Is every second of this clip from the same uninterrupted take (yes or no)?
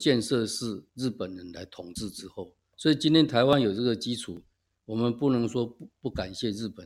yes